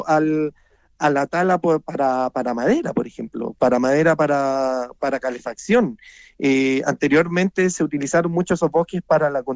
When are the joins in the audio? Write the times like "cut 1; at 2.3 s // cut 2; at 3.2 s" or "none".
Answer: none